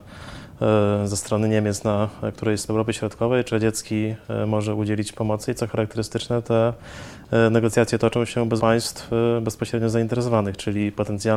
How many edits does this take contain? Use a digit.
3